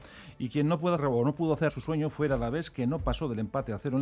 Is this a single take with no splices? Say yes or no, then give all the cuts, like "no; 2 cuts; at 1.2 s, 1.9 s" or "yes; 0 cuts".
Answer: no; 2 cuts; at 1.0 s, 1.7 s